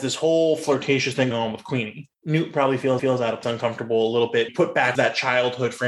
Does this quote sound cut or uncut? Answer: cut